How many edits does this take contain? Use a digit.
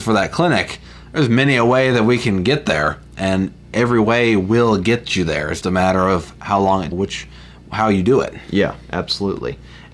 2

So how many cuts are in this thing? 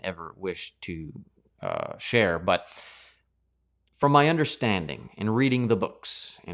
0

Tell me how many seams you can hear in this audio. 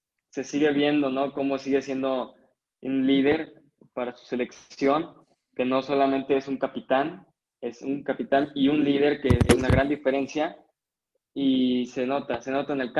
0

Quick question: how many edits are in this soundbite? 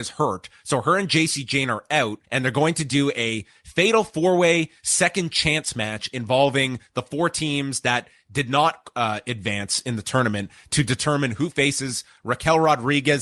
1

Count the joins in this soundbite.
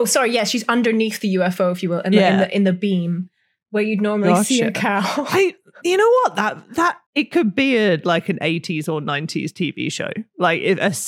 0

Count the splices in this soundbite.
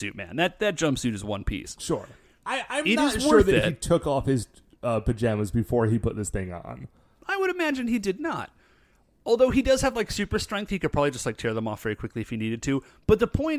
0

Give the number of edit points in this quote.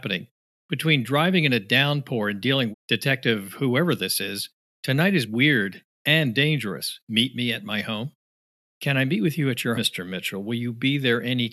3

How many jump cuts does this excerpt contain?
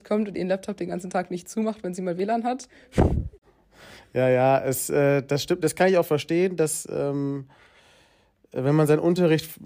0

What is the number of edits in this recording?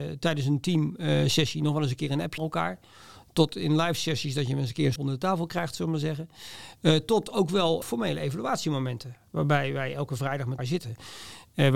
4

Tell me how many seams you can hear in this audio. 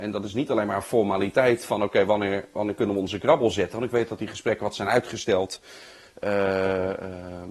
0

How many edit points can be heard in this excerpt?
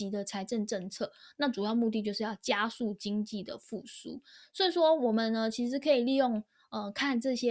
0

